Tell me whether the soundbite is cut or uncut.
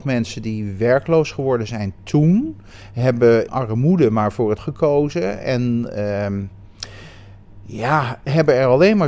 cut